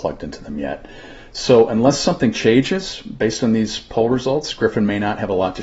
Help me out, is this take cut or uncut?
uncut